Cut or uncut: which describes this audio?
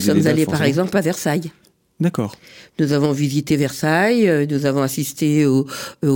uncut